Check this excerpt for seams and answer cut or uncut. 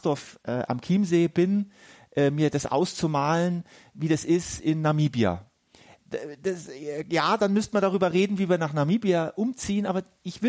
uncut